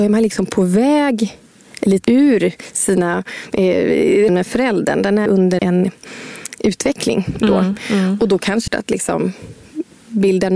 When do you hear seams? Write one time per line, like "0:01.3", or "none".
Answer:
0:02.0
0:04.3
0:05.3
0:05.6
0:08.7